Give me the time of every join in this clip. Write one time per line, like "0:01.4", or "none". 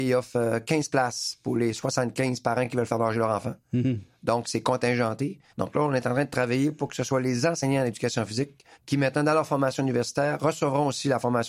0:05.5
0:08.7